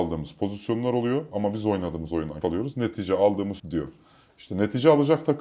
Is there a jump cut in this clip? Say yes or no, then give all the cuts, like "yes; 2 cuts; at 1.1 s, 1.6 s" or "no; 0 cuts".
yes; 2 cuts; at 2.4 s, 3.6 s